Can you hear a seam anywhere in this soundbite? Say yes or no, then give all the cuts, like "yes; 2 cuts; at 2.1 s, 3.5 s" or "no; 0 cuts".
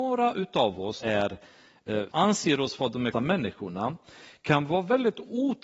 yes; 3 cuts; at 1.0 s, 2.1 s, 3.1 s